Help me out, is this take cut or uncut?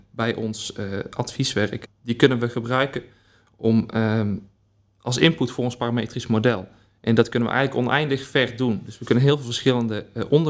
cut